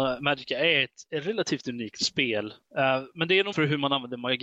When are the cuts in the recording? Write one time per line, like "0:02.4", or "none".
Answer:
0:03.5